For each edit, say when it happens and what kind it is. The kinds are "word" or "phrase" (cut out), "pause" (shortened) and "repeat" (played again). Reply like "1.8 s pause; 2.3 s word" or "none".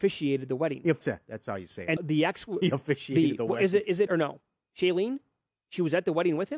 1.0 s word; 2.0 s word; 4.1 s phrase